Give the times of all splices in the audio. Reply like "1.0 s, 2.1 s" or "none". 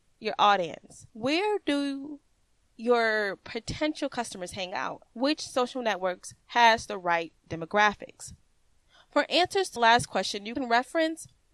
1.1 s, 5.1 s, 6.4 s, 9.8 s